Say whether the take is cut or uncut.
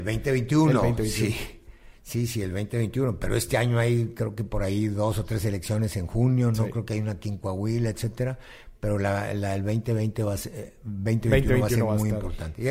uncut